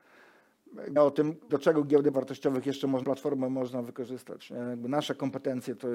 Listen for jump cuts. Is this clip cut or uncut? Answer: cut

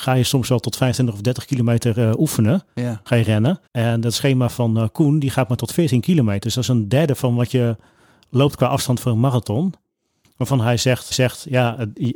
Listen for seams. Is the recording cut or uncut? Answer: cut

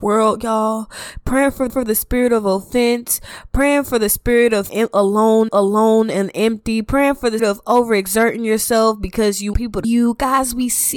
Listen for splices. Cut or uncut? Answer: cut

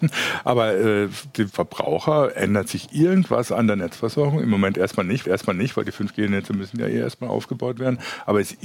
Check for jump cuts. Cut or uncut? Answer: cut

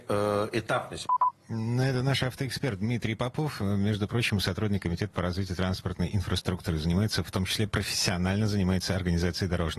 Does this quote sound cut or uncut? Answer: uncut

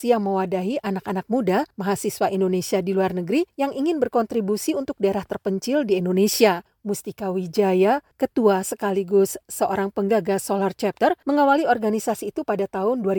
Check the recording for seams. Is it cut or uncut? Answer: uncut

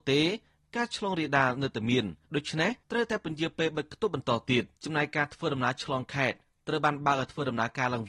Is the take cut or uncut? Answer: cut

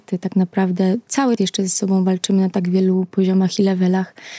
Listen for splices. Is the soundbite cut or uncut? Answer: cut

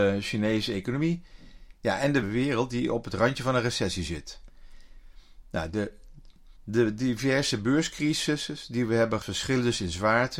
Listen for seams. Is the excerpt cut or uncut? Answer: cut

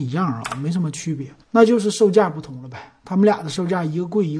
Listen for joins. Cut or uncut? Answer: cut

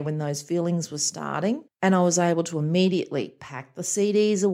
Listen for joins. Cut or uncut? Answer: cut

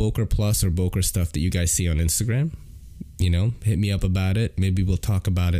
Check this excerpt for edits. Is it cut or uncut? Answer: uncut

